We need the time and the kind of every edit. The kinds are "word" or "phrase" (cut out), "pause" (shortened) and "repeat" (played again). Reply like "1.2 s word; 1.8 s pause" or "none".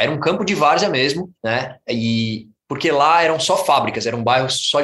1.4 s pause